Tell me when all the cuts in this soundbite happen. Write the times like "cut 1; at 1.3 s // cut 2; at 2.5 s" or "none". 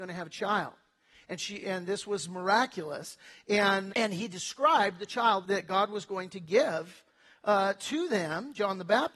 cut 1; at 1.6 s // cut 2; at 3.9 s // cut 3; at 5.4 s